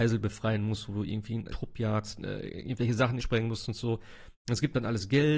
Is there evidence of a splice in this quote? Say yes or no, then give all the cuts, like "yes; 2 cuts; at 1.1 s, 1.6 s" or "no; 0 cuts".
yes; 2 cuts; at 1.5 s, 3.2 s